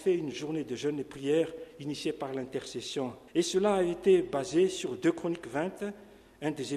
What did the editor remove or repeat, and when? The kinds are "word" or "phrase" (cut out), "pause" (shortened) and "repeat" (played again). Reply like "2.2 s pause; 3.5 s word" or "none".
3.3 s pause